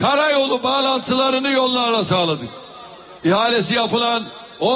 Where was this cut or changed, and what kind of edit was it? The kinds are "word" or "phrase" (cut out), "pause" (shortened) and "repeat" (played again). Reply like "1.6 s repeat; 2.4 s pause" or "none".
3.2 s pause